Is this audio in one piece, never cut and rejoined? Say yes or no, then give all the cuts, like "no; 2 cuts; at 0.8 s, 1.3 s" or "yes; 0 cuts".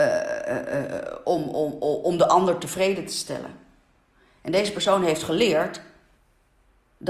yes; 0 cuts